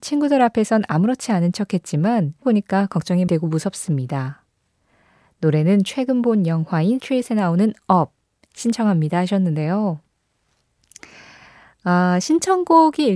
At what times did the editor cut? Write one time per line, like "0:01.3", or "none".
0:02.4
0:03.3
0:07.0